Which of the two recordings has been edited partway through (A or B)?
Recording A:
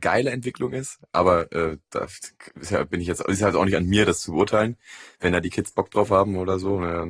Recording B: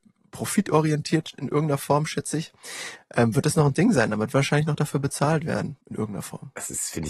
B